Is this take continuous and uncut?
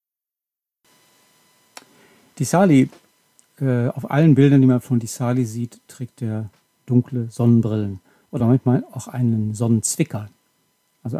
yes; 0 cuts

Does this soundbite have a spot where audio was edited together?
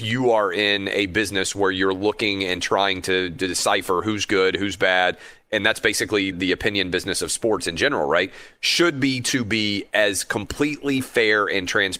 yes; 1 cut; at 6.3 s

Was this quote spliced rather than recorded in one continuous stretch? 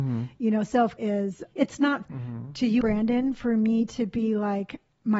yes; 4 cuts; at 1.0 s, 1.5 s, 2.0 s, 2.8 s

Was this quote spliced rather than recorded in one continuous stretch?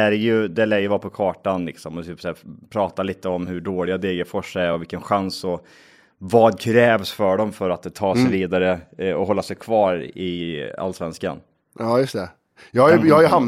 no; 0 cuts

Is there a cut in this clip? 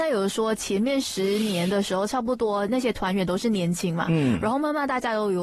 no; 0 cuts

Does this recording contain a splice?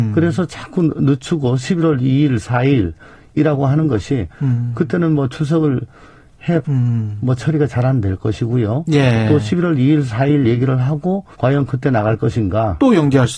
yes; 2 cuts; at 6.6 s, 11.3 s

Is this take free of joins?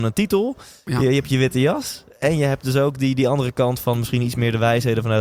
yes; 0 cuts

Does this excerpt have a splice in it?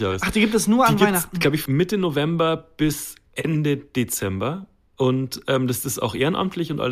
yes; 1 cut; at 1.7 s

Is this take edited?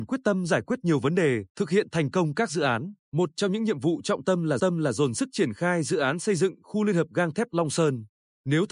yes; 3 cuts; at 1.5 s, 3.0 s, 4.6 s

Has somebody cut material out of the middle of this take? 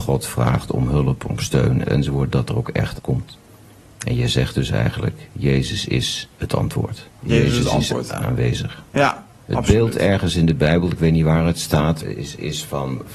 yes; 5 cuts; at 1.9 s, 3.0 s, 6.3 s, 7.2 s, 12.0 s

